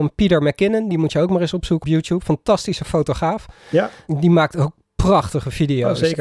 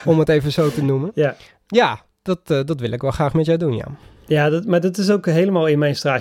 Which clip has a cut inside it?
first; 1 cut; at 1.8 s

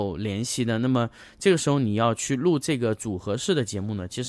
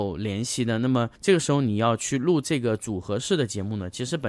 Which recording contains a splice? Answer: second; 1 cut; at 1.2 s

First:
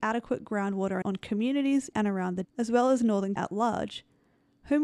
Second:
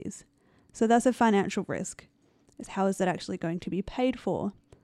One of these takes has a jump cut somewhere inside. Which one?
first; 4 cuts; at 1.0 s, 1.9 s, 2.4 s, 3.4 s

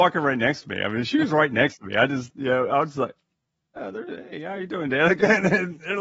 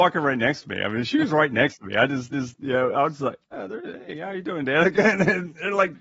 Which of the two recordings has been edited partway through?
second; 2 cuts; at 2.3 s, 3.4 s

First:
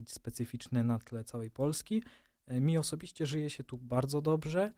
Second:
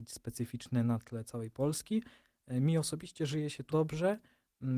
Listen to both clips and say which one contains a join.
second; 1 cut; at 3.7 s

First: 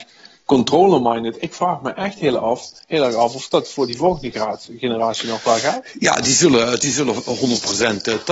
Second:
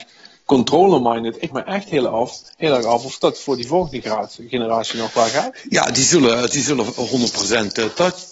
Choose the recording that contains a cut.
second; 1 cut; at 1.5 s

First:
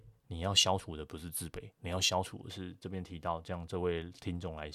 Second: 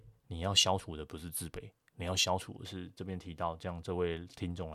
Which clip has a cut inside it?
first; 1 cut; at 1.7 s

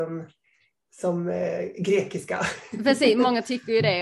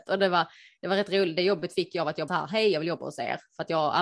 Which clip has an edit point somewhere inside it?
second; 1 cut; at 2.3 s

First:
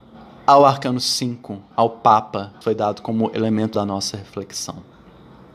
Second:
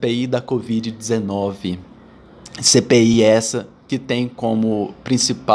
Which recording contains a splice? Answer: first; 2 cuts; at 2.6 s, 3.7 s

